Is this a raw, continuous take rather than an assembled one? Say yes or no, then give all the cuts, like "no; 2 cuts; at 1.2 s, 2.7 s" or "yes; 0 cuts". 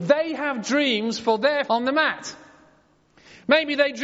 no; 1 cut; at 1.7 s